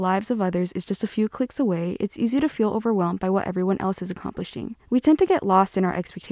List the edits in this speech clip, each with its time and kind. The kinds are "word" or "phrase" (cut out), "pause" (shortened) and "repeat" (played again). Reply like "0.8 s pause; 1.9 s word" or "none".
4.8 s pause